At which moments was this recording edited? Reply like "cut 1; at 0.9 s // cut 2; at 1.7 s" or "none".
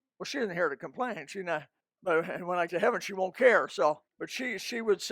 cut 1; at 1.8 s // cut 2; at 2.7 s // cut 3; at 4.1 s